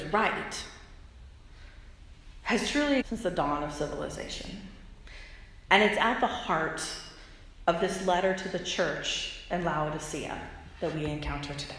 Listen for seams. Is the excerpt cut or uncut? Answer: cut